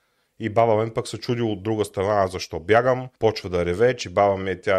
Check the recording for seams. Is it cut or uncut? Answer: cut